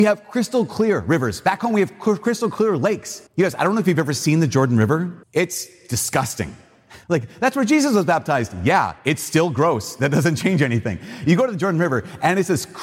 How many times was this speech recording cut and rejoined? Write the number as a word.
four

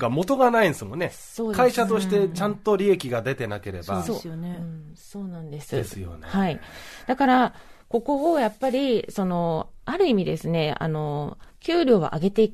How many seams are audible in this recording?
one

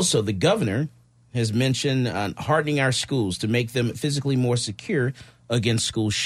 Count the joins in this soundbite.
zero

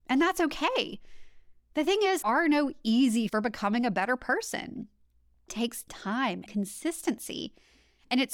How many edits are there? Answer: four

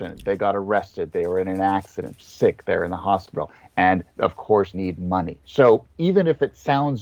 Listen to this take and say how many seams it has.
three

